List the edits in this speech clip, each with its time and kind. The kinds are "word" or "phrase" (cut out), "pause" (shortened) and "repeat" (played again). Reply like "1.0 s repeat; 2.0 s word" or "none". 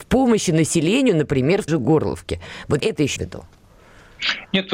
1.7 s word; 2.8 s word; 3.2 s word